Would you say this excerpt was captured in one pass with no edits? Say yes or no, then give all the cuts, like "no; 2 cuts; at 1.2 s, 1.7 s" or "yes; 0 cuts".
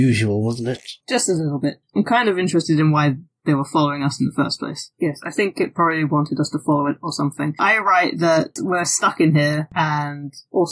no; 2 cuts; at 1.8 s, 4.9 s